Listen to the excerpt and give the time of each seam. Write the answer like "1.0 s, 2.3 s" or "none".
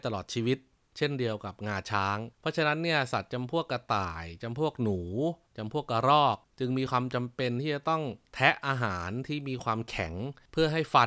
2.3 s